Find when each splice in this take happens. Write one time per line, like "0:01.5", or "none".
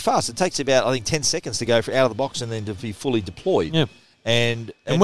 none